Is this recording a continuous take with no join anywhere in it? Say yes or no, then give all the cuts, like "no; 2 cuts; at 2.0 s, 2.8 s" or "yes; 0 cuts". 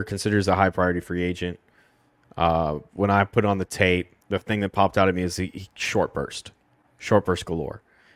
no; 1 cut; at 4.2 s